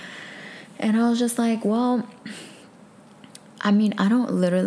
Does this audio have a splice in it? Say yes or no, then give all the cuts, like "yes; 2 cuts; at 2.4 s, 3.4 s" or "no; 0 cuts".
no; 0 cuts